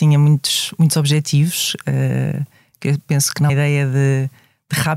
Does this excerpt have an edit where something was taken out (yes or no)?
yes